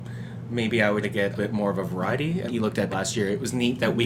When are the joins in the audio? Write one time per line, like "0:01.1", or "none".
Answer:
0:01.0
0:01.4
0:02.5
0:02.9